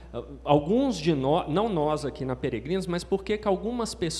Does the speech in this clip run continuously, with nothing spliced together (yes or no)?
yes